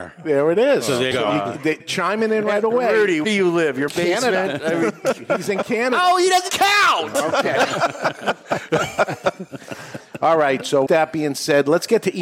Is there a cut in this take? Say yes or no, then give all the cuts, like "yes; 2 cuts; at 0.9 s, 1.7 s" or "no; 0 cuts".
yes; 6 cuts; at 1.1 s, 1.8 s, 3.2 s, 3.9 s, 6.5 s, 10.9 s